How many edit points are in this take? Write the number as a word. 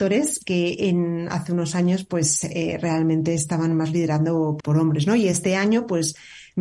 one